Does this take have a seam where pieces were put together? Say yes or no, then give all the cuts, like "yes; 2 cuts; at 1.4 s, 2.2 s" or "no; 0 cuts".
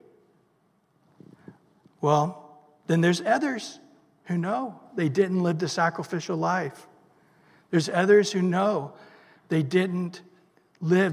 no; 0 cuts